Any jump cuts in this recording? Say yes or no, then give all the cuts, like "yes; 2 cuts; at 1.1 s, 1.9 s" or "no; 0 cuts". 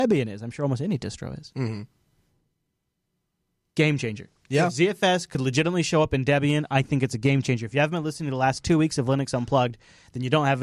no; 0 cuts